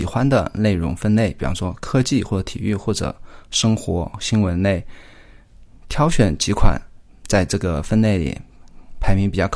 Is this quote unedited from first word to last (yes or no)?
yes